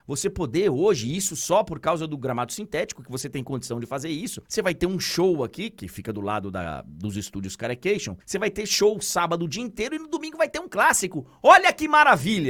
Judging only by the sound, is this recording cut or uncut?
cut